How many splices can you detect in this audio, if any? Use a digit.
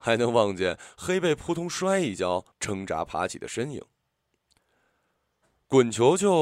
1